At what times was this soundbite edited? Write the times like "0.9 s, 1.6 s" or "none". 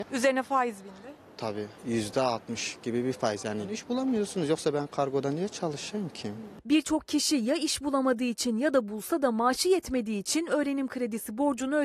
none